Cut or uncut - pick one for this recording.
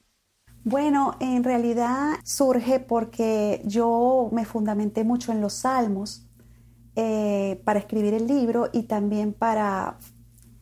cut